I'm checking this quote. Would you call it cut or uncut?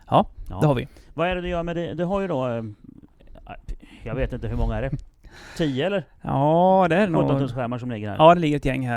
uncut